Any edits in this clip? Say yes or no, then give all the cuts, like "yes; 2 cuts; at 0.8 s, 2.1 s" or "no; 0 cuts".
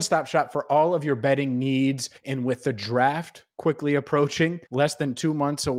yes; 2 cuts; at 2.2 s, 4.7 s